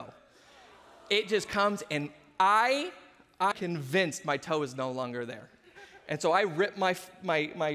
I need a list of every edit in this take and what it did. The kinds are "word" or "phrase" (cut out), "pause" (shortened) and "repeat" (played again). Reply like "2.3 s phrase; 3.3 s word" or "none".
3.5 s word